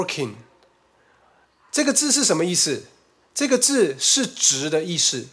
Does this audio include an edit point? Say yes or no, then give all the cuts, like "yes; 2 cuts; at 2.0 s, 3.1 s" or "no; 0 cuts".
no; 0 cuts